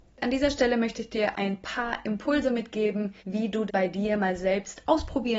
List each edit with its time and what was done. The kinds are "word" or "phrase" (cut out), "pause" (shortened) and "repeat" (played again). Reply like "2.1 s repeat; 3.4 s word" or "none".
1.3 s word; 3.2 s pause; 3.7 s word